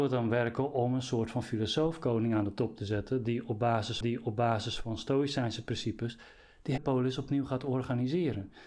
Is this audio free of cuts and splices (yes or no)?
no